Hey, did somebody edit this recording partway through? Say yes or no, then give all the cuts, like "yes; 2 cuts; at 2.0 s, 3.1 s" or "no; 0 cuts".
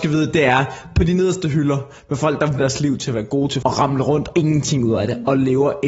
yes; 3 cuts; at 2.6 s, 3.6 s, 4.3 s